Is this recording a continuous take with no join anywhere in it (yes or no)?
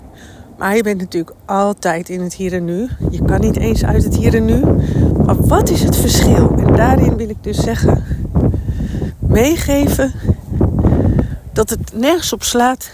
yes